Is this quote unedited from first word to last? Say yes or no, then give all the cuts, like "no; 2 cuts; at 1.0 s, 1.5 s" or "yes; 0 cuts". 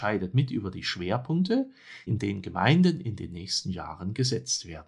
no; 1 cut; at 2.1 s